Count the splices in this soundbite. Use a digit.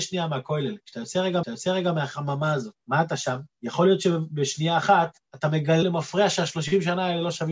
5